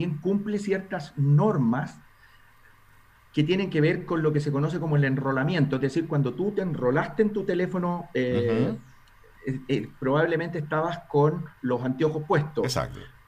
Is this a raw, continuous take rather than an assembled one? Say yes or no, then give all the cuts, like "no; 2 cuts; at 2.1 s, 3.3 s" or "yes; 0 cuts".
yes; 0 cuts